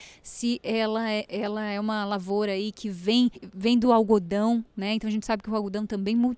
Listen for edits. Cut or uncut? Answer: uncut